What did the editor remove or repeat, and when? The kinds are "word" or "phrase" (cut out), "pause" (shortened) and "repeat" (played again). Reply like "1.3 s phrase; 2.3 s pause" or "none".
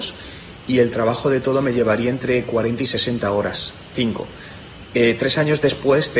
3.9 s word

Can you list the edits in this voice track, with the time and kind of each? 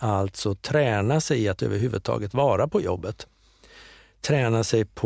none

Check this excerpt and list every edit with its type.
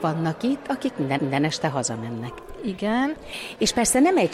1.2 s repeat

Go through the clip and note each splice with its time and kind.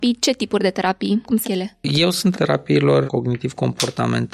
1.4 s word; 2.3 s word; 3.1 s word

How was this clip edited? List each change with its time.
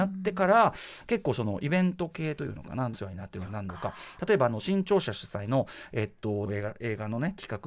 2.9 s phrase; 6.5 s phrase

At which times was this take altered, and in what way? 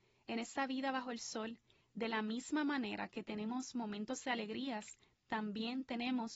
none

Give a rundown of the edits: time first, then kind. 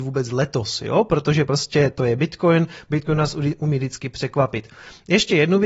none

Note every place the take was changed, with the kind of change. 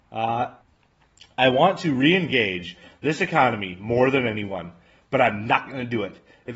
none

